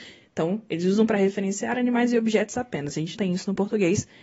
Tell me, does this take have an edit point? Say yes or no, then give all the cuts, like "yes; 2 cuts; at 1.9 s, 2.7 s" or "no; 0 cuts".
yes; 1 cut; at 3.1 s